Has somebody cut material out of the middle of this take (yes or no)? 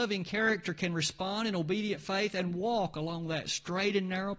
no